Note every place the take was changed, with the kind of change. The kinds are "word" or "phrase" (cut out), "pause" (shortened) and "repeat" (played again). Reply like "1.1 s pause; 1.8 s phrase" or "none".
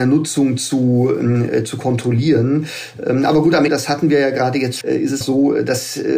3.7 s word; 4.8 s word; 5.2 s word